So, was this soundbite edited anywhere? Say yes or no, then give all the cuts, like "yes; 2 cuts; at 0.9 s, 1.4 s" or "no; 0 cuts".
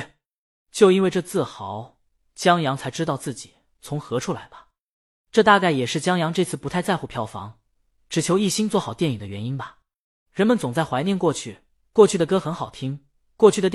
no; 0 cuts